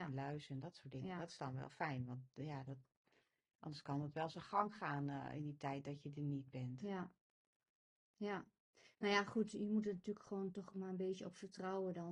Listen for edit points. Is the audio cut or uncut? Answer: uncut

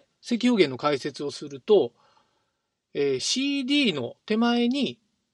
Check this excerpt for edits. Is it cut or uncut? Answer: uncut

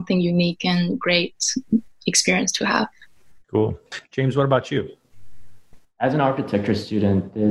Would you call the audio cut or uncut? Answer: uncut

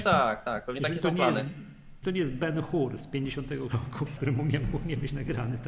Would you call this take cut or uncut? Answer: cut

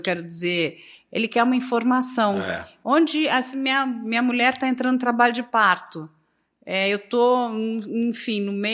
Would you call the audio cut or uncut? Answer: uncut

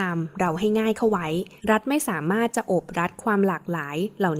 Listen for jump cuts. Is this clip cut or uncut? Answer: cut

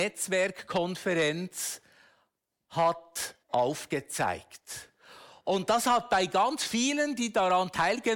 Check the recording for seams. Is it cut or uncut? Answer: cut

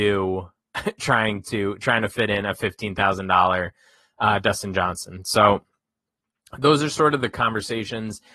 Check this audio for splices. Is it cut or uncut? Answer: uncut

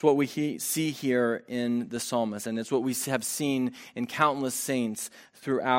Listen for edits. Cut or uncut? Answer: uncut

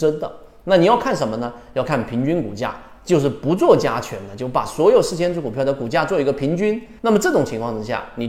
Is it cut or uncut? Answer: cut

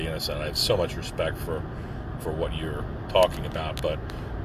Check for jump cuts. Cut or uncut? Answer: uncut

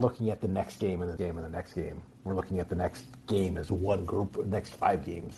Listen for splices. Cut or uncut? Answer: cut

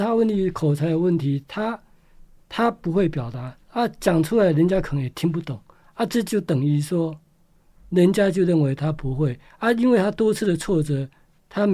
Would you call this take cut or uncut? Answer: cut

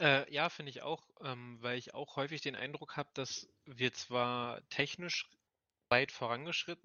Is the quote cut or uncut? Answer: uncut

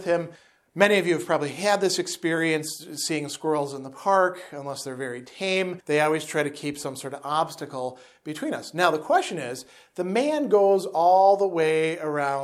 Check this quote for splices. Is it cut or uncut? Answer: uncut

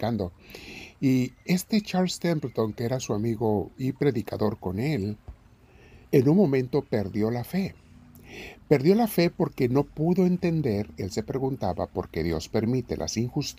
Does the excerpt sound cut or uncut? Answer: cut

